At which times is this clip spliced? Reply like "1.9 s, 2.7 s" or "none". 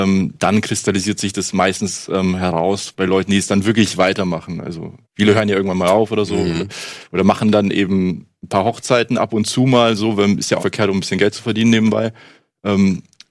5.0 s, 10.6 s